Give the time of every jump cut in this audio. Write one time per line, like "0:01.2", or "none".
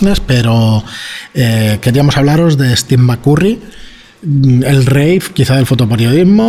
none